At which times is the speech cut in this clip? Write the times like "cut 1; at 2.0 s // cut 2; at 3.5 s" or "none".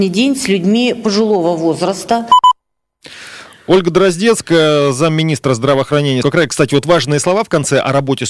cut 1; at 6.2 s